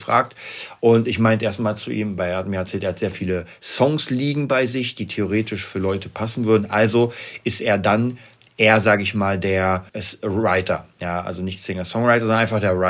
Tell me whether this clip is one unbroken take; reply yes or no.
no